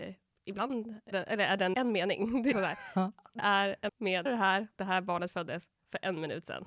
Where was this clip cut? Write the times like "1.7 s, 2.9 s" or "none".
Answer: 1.1 s, 1.7 s, 2.5 s, 3.4 s, 3.9 s, 4.3 s, 4.8 s